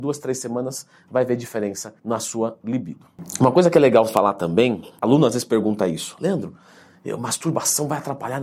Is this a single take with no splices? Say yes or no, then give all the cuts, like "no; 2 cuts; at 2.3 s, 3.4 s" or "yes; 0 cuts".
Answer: no; 1 cut; at 2.0 s